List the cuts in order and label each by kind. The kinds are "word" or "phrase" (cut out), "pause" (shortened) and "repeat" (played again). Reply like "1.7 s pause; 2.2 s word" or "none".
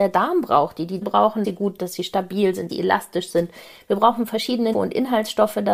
1.0 s word; 1.4 s word; 1.8 s word; 2.7 s word; 4.7 s word

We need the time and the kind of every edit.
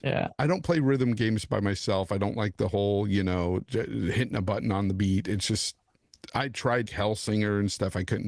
6.9 s word

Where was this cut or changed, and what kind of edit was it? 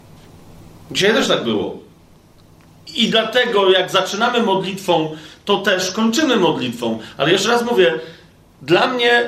none

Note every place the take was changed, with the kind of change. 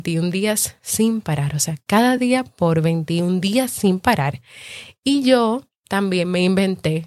none

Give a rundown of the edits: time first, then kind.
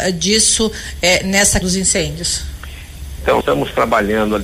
1.6 s word; 3.4 s word

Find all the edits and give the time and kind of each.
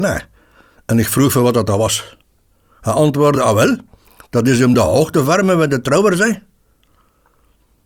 none

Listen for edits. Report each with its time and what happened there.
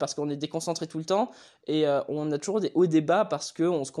none

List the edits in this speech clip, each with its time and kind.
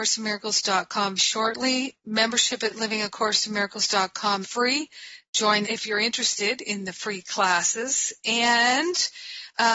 1.2 s word; 4.4 s word; 5.6 s phrase

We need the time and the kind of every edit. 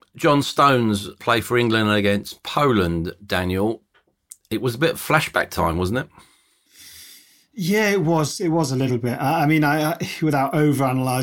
none

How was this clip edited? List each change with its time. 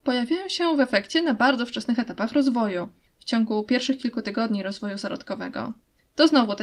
none

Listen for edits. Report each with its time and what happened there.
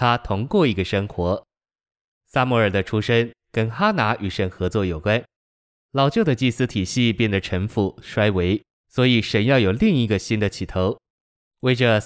none

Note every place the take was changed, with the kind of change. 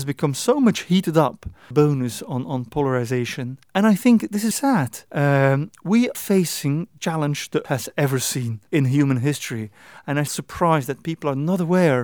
1.7 s phrase; 3.6 s pause; 4.5 s word; 5.1 s pause; 6.1 s word; 7.0 s word; 7.6 s word; 8.7 s pause; 10.3 s word

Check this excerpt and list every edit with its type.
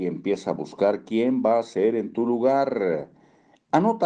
none

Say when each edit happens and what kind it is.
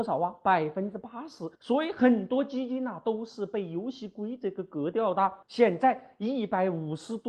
1.5 s pause; 5.4 s pause

